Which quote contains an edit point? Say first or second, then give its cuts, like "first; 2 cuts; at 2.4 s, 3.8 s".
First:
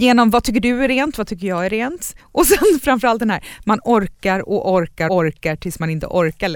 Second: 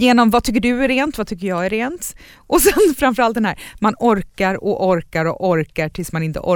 first; 2 cuts; at 2.2 s, 5.1 s